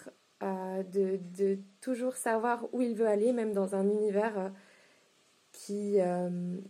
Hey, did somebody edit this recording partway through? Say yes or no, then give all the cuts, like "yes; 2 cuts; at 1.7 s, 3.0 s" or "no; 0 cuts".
no; 0 cuts